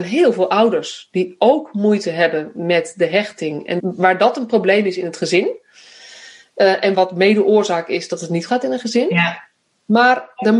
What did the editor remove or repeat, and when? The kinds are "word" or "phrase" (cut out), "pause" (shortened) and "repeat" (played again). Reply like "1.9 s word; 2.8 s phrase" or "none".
3.8 s word; 6.9 s word; 8.5 s word